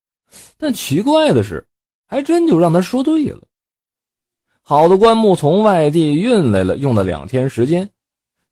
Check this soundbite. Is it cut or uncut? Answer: uncut